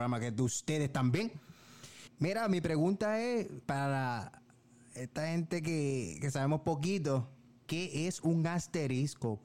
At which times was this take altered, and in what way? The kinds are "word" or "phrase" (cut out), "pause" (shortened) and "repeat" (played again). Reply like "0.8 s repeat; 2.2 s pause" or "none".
2.1 s pause; 3.6 s pause; 7.5 s pause